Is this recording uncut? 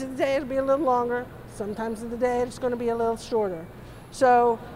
yes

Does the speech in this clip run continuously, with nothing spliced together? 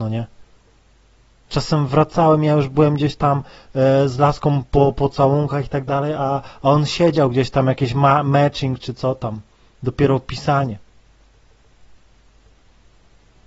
yes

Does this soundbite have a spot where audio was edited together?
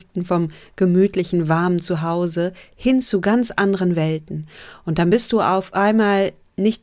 no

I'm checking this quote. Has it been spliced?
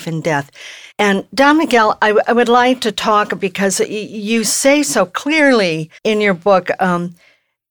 yes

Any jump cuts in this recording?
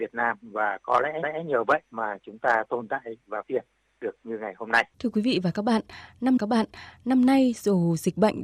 yes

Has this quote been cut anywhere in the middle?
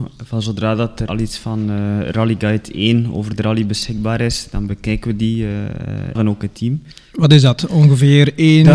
yes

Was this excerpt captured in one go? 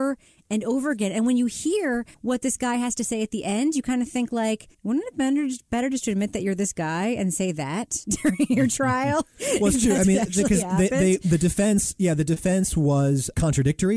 no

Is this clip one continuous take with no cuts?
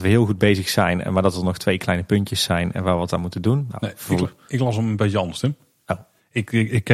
yes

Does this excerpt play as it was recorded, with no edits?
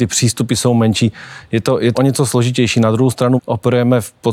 no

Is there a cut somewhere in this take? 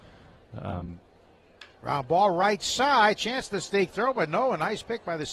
yes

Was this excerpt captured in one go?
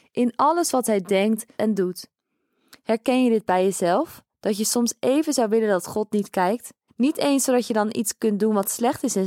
no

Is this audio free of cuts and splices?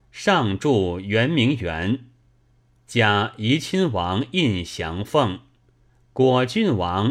yes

